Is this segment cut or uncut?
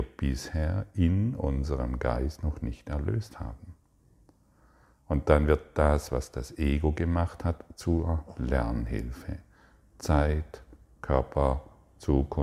uncut